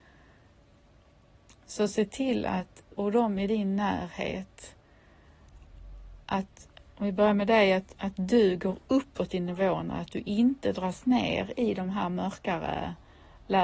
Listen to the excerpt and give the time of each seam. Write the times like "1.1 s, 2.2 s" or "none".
2.9 s, 6.2 s